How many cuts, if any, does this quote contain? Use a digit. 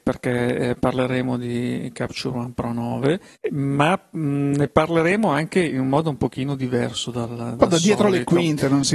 1